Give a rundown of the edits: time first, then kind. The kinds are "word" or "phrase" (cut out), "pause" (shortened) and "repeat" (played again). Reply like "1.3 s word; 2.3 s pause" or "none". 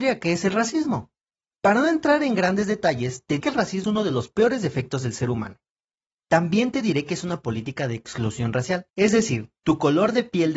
3.4 s word; 3.8 s word; 8.9 s pause

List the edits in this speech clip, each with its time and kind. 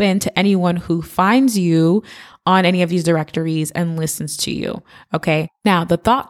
none

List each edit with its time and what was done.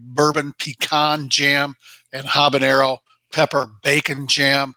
none

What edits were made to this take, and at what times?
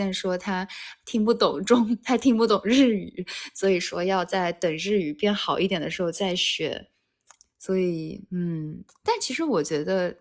none

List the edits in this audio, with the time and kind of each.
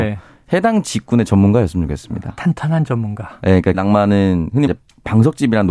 3.7 s phrase; 4.7 s word

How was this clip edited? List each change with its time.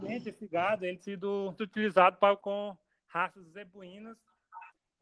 1.0 s word; 1.6 s word; 2.4 s word

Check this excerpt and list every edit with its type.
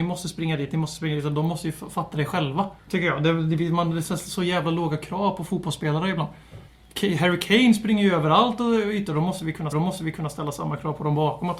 2.8 s pause; 9.7 s repeat

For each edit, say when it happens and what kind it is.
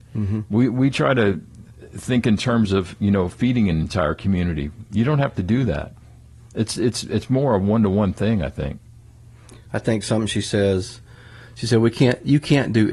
none

